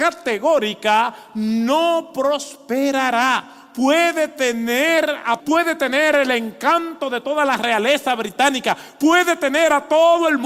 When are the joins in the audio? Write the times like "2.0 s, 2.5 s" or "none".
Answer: 5.4 s